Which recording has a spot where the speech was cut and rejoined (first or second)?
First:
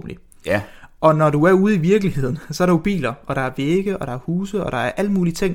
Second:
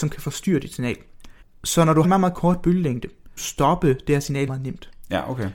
second